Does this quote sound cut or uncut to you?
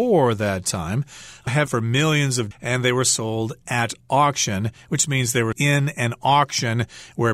cut